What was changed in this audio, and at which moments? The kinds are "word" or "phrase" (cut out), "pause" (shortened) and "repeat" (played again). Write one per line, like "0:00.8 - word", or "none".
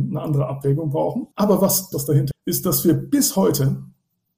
0:01.3 - pause
0:01.9 - phrase
0:02.3 - word